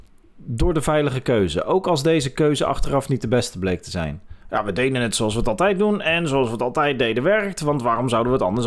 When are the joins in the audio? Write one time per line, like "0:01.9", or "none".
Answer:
0:04.4